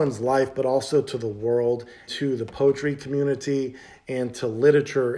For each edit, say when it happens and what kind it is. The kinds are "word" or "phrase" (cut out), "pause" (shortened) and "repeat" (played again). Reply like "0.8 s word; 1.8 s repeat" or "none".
2.1 s word